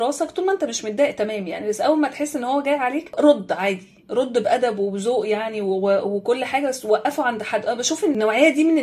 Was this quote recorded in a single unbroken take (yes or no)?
yes